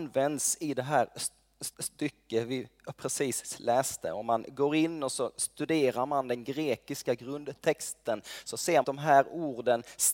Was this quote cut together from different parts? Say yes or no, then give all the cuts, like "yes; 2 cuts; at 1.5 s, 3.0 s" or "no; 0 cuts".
yes; 2 cuts; at 1.7 s, 8.8 s